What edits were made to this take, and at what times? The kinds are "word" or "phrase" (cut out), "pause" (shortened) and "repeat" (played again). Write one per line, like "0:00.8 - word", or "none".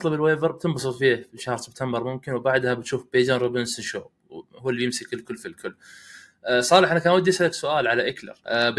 none